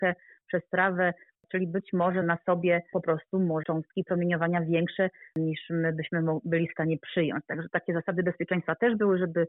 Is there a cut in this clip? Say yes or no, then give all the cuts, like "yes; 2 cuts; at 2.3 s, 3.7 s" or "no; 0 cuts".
yes; 3 cuts; at 2.2 s, 2.9 s, 3.6 s